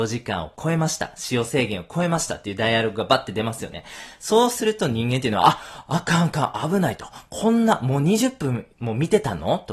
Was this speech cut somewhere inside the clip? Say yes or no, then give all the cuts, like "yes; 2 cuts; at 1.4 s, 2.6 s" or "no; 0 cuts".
no; 0 cuts